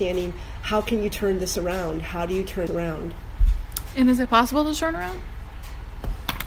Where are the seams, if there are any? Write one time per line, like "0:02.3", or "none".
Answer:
0:02.7